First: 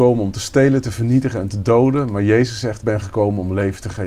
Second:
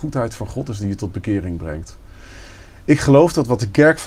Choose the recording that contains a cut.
first; 1 cut; at 2.8 s

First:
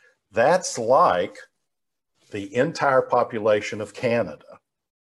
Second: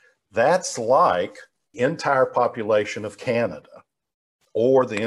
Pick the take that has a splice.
second; 1 cut; at 1.7 s

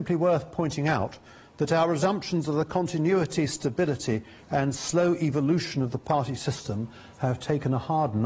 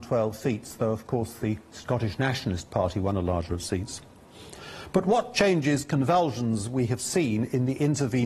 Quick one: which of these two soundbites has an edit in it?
second; 1 cut; at 3.5 s

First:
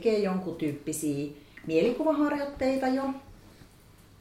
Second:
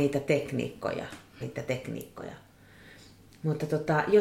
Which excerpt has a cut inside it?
second; 1 cut; at 1.4 s

